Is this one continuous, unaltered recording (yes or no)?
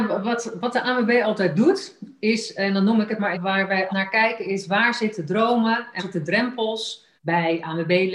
no